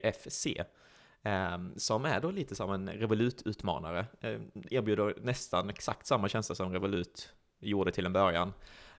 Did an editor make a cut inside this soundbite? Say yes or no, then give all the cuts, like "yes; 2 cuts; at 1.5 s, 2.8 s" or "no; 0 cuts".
no; 0 cuts